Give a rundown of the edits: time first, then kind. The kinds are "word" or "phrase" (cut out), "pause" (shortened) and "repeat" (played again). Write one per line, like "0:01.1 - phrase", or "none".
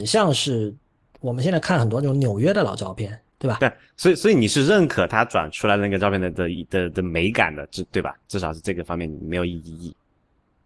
0:03.3 - pause